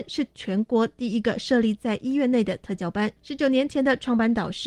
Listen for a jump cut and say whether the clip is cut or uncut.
cut